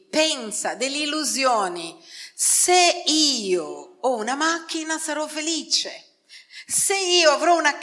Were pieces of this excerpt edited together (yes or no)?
no